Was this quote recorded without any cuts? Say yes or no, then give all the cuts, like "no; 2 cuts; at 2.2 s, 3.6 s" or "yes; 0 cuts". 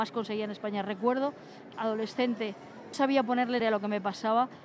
no; 3 cuts; at 1.7 s, 2.9 s, 3.6 s